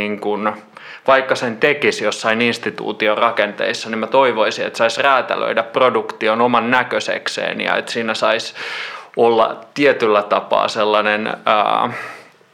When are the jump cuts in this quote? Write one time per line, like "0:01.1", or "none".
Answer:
none